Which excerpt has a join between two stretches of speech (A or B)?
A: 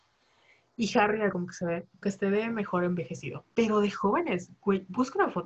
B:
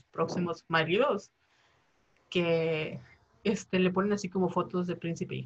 A